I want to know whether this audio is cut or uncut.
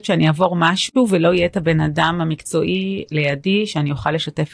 uncut